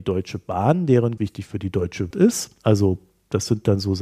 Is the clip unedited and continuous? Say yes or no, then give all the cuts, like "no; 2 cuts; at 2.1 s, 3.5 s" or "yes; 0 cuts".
no; 3 cuts; at 1.2 s, 2.1 s, 2.6 s